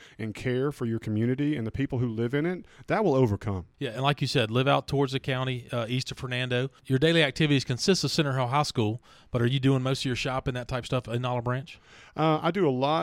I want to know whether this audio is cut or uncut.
uncut